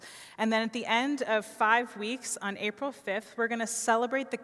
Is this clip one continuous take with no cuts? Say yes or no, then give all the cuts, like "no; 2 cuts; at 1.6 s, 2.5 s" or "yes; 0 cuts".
yes; 0 cuts